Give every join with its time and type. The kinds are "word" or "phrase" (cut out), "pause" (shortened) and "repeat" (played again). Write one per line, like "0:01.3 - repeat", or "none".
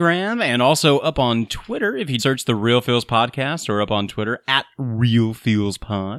0:02.2 - word